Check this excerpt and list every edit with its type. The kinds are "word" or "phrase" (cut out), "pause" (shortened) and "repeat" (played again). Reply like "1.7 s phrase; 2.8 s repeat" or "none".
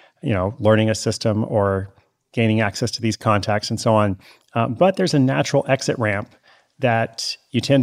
none